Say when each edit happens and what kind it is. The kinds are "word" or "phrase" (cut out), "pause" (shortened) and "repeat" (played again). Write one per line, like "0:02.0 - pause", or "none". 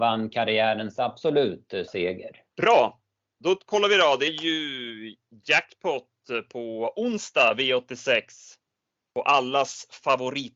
0:01.9 - word
0:02.5 - pause
0:04.3 - word